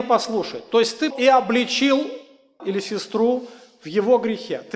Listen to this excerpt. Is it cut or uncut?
cut